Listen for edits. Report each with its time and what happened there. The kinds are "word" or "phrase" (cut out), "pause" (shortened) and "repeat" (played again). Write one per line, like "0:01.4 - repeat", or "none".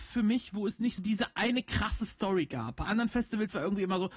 0:01.0 - word
0:02.8 - word